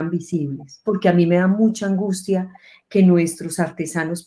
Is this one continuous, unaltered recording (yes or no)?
yes